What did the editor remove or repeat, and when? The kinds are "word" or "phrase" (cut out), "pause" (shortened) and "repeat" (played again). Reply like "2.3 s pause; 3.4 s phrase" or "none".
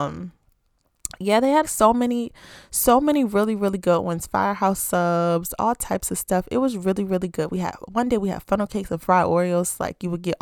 1.6 s word